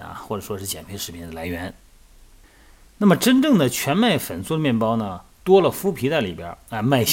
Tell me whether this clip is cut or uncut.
uncut